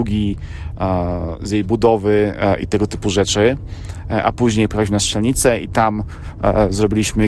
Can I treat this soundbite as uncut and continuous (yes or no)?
yes